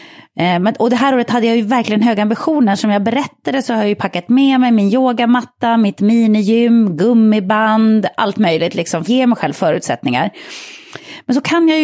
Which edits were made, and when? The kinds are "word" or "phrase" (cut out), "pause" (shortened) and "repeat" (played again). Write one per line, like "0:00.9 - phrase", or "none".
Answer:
0:09.1 - phrase

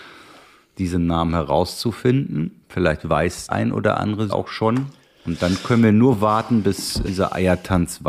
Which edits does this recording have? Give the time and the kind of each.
0:03.5 - word
0:04.3 - word
0:07.0 - word

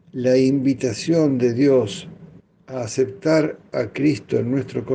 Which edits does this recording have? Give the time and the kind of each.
0:02.4 - pause

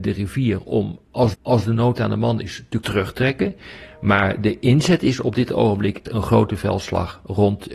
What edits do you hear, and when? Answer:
0:01.3 - repeat
0:02.8 - word
0:06.1 - word

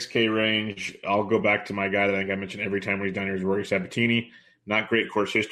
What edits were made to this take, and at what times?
none

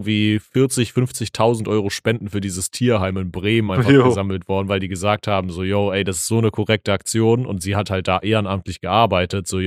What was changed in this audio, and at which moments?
none

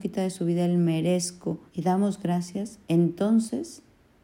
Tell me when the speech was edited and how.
0:01.7 - pause
0:02.8 - pause

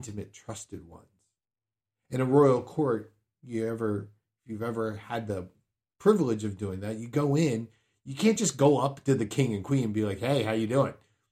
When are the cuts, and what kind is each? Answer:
none

